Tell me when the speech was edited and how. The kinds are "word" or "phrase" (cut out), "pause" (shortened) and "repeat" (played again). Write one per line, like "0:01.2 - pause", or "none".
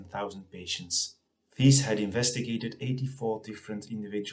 none